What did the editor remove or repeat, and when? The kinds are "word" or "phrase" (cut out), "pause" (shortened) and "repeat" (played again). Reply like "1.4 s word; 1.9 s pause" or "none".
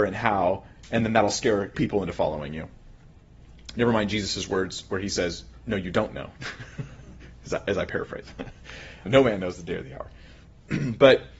1.7 s phrase; 9.1 s word